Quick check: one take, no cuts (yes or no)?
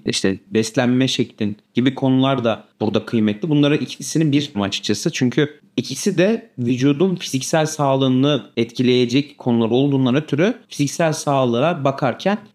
no